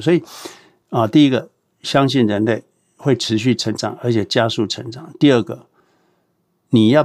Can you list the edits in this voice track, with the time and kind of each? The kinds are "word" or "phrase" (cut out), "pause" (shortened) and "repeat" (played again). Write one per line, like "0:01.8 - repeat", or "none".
none